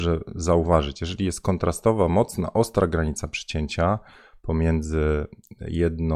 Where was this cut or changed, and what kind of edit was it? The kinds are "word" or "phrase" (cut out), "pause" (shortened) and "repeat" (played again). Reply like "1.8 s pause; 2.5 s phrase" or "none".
none